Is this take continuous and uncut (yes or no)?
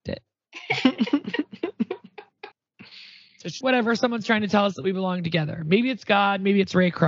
no